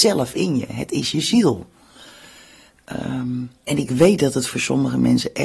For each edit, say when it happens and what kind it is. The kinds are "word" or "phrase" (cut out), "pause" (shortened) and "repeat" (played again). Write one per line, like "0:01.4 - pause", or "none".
0:03.6 - pause